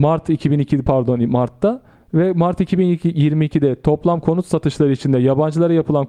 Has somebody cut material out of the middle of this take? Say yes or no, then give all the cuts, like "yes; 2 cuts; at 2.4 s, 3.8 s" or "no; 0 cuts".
yes; 1 cut; at 1.9 s